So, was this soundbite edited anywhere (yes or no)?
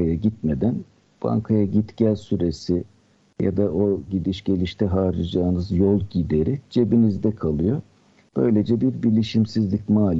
no